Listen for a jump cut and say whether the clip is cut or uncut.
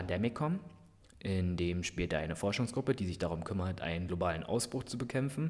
uncut